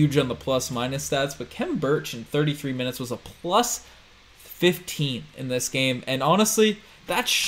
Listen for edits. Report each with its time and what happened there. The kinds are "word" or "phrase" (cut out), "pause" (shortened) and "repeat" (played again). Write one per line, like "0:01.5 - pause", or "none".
none